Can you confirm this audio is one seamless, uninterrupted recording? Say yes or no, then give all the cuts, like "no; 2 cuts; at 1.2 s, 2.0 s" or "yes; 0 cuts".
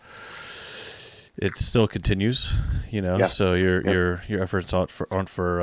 no; 1 cut; at 1.3 s